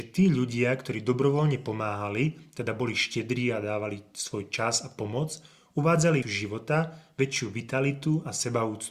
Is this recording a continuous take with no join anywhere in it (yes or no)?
no